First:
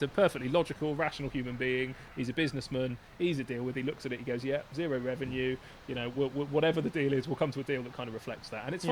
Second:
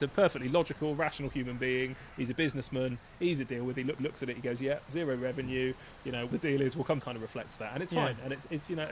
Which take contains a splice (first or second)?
second